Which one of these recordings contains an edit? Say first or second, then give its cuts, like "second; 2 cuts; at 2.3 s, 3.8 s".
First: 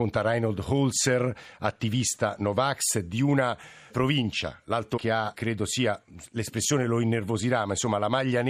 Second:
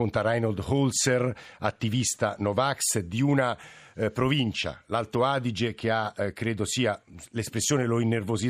first; 3 cuts; at 3.9 s, 5.0 s, 5.3 s